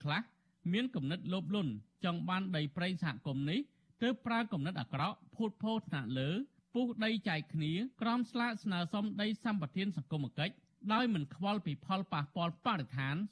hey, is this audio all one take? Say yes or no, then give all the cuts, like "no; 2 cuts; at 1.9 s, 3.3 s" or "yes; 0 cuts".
no; 1 cut; at 7.9 s